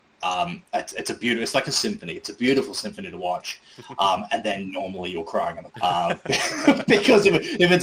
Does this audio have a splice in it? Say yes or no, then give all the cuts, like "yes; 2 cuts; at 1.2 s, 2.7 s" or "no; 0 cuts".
yes; 1 cut; at 5.7 s